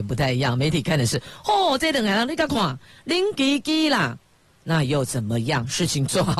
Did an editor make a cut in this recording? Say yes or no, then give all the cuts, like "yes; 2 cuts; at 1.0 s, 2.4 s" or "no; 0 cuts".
no; 0 cuts